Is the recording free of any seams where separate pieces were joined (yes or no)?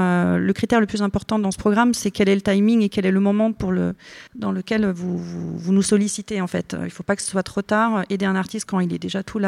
no